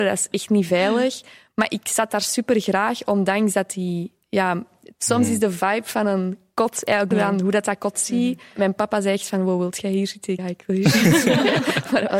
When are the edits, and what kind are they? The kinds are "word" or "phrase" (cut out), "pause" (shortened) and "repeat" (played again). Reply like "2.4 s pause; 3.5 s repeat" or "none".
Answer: 7.1 s word; 7.9 s word; 10.4 s word